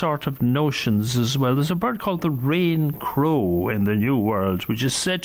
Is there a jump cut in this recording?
no; 0 cuts

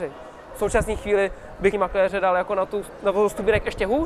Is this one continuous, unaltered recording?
no; 1 cut; at 1.7 s

